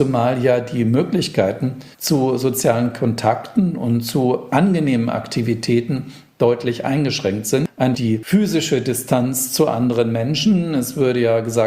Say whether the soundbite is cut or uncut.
cut